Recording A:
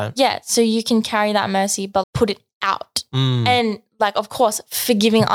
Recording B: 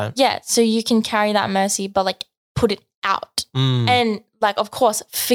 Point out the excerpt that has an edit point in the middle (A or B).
A